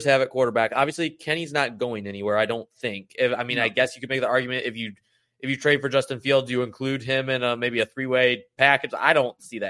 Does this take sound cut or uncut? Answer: uncut